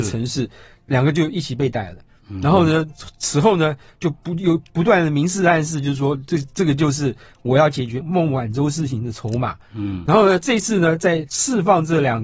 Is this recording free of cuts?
yes; 0 cuts

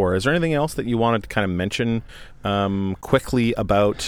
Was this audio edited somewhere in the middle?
no; 0 cuts

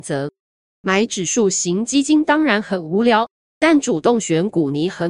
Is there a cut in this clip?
no; 0 cuts

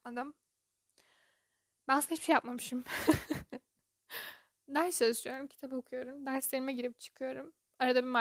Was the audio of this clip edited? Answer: no; 0 cuts

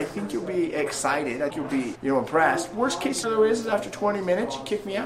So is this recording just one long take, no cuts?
no; 3 cuts; at 1.5 s, 1.9 s, 3.2 s

